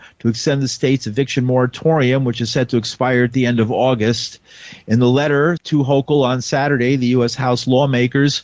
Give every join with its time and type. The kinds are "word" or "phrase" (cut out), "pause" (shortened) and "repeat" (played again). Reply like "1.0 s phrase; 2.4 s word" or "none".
5.6 s word